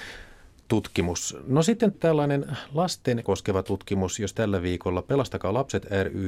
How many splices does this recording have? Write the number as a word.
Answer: three